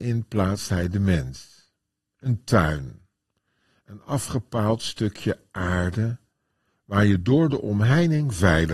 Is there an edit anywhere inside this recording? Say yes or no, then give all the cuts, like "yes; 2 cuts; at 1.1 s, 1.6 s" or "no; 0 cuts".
no; 0 cuts